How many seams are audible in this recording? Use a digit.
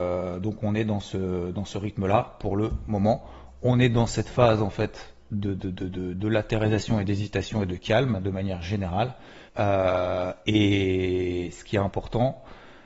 1